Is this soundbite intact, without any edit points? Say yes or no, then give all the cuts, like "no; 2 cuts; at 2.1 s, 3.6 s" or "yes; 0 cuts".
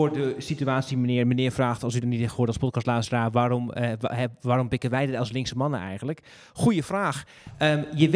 yes; 0 cuts